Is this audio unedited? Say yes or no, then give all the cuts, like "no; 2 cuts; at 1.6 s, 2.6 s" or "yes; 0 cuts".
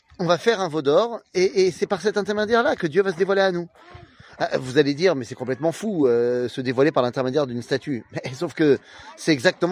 yes; 0 cuts